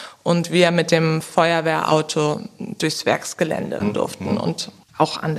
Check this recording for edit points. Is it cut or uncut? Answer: cut